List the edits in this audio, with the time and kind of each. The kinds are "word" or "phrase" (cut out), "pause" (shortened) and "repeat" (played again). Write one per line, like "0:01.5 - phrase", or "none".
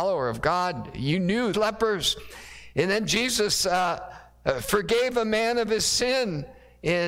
0:01.5 - phrase

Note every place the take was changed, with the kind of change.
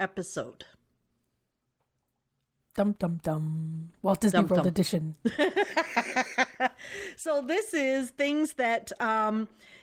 none

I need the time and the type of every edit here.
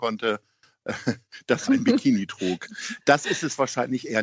0:01.7 - word

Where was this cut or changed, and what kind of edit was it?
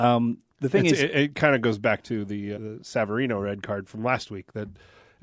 0:02.5 - word

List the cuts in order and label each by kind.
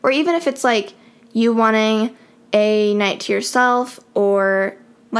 none

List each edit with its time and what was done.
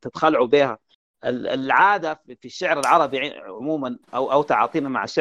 none

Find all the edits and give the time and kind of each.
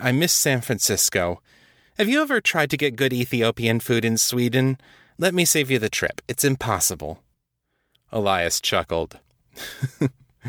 none

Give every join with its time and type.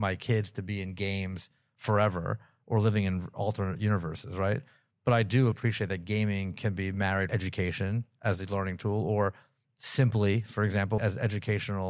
0:05.5 - word
0:07.3 - word
0:11.0 - word

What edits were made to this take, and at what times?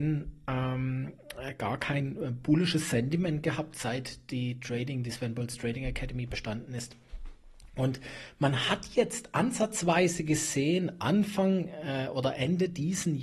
none

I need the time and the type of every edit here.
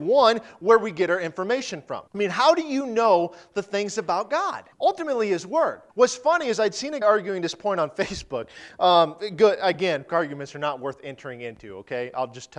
0:02.1 - pause
0:04.7 - pause
0:05.9 - pause
0:07.0 - word
0:10.1 - word

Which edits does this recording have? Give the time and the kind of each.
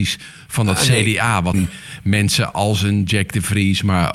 0:01.5 - phrase

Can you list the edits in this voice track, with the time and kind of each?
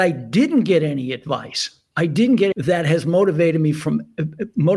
0:02.5 - phrase

